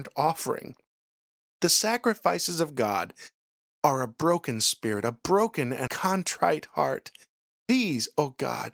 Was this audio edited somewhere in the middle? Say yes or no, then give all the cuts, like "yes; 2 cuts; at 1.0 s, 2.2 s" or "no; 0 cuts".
yes; 1 cut; at 5.9 s